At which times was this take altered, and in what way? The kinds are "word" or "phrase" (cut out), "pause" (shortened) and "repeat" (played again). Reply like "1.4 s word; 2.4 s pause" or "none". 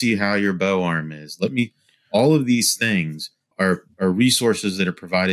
3.5 s word